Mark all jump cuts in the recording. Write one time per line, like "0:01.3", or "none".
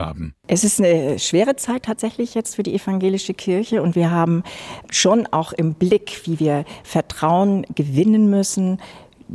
none